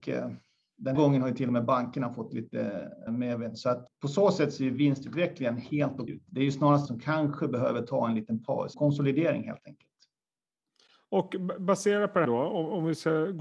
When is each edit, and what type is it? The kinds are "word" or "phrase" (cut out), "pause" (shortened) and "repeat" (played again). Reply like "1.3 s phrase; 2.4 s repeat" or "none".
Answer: 0.9 s word; 3.1 s word; 3.9 s word; 6.1 s word; 6.9 s word; 8.7 s word; 12.2 s word